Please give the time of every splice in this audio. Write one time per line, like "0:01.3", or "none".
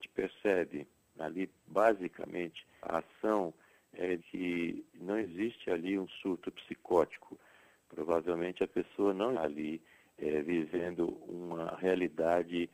0:02.8
0:04.2
0:09.3

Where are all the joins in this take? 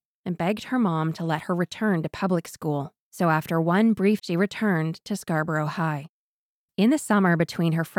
0:04.2

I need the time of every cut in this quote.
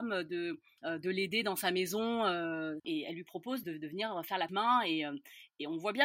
0:02.8
0:03.6
0:04.5

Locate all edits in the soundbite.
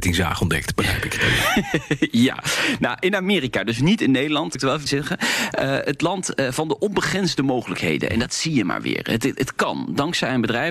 0:04.5
0:04.9

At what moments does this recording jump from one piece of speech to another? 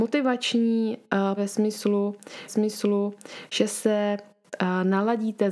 0:01.4
0:02.5

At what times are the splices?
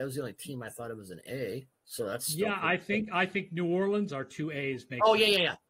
0:04.1

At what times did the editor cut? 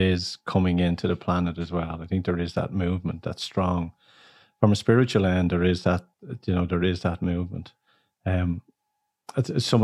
none

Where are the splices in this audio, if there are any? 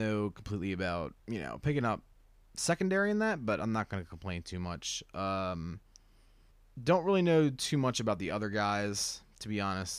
0:01.2
0:06.5

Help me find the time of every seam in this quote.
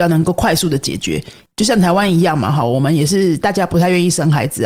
none

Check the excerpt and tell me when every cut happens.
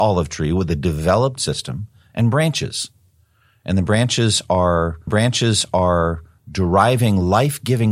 0:01.4
0:05.1

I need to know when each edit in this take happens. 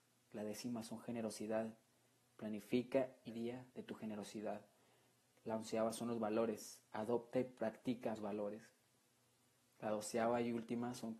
0:03.3
0:03.7
0:08.2

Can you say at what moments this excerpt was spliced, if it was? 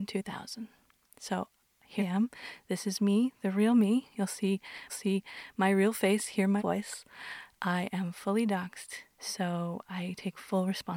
0:02.0
0:04.9
0:06.6
0:09.1

